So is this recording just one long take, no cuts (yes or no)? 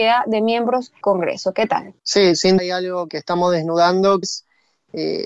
no